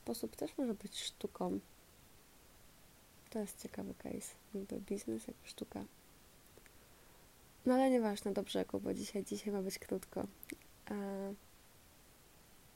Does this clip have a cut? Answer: no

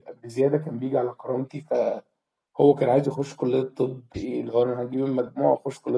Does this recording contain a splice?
yes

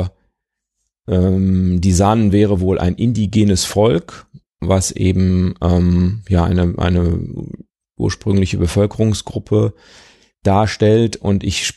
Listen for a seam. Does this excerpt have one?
yes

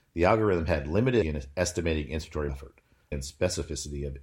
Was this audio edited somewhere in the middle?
yes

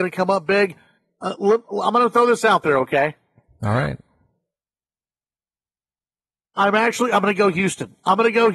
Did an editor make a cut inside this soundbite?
no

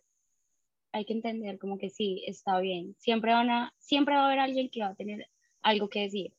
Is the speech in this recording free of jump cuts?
yes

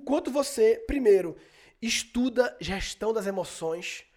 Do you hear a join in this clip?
no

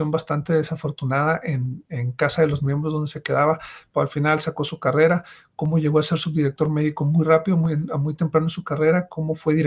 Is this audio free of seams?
yes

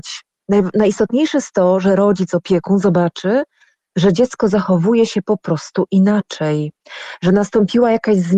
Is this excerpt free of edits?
yes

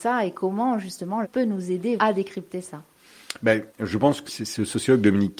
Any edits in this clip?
yes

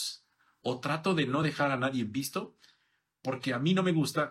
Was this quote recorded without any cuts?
yes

